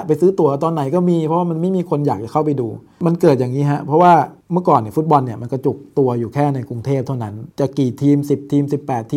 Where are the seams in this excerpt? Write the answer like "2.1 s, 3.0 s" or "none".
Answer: 4.4 s, 7.5 s